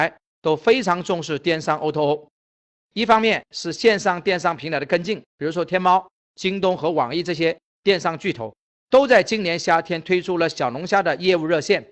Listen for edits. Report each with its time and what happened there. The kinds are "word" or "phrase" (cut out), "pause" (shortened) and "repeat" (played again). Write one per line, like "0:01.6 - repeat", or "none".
0:05.3 - pause

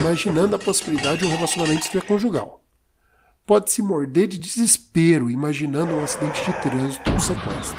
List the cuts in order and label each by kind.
none

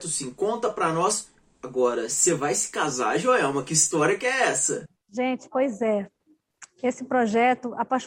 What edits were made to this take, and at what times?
none

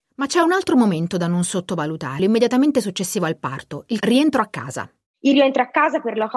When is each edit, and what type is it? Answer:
0:02.2 - phrase
0:04.0 - word

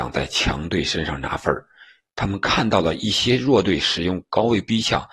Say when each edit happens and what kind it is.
none

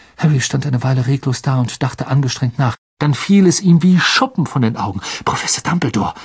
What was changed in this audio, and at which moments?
none

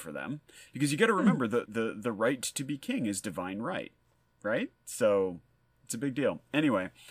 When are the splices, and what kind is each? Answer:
0:01.7 - word

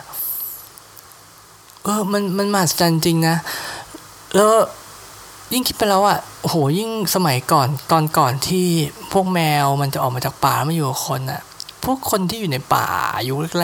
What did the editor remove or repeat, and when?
none

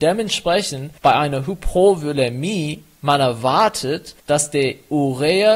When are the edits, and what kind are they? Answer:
0:01.0 - pause
0:04.2 - pause

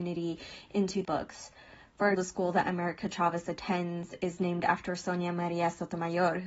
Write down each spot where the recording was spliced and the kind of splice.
0:01.0 - phrase
0:02.1 - word

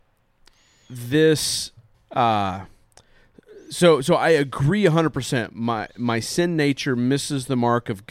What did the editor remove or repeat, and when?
0:01.9 - pause

